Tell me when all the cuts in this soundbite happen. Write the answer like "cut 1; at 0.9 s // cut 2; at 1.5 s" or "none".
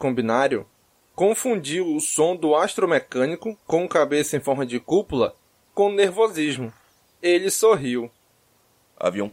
none